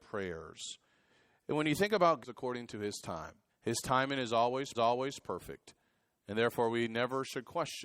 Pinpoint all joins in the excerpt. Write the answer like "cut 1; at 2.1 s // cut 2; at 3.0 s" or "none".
cut 1; at 2.2 s // cut 2; at 3.5 s // cut 3; at 4.7 s